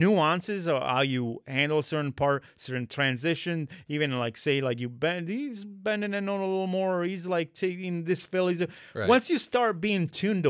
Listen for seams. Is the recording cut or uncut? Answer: uncut